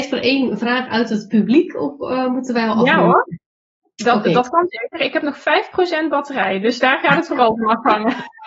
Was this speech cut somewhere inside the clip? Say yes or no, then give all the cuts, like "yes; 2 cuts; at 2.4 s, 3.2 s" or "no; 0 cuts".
no; 0 cuts